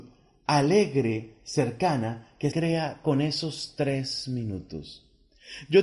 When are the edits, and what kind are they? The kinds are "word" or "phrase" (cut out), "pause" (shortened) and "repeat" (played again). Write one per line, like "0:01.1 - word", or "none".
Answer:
0:02.5 - word